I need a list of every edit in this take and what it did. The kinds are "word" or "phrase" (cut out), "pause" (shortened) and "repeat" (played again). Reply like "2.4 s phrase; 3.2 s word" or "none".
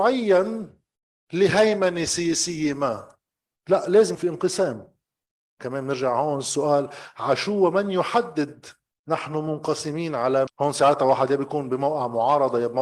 4.1 s word; 10.5 s word